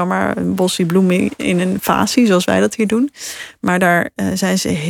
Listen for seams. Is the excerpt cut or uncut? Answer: uncut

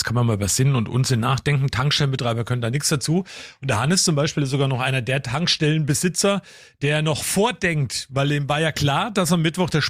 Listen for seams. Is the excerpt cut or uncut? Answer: uncut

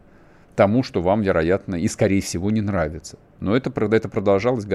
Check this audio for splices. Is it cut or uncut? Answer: uncut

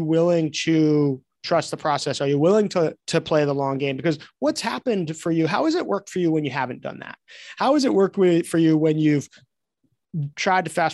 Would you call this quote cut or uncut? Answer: cut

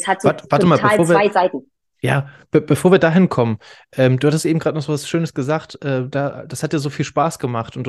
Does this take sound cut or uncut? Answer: uncut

